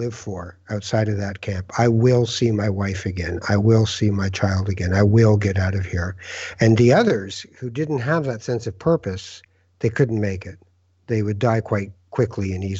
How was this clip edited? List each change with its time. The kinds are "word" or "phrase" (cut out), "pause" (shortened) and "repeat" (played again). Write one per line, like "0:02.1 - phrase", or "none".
none